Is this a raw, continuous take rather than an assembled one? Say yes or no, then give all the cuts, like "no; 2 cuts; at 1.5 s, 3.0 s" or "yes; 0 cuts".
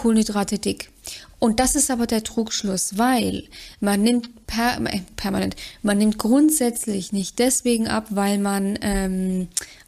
yes; 0 cuts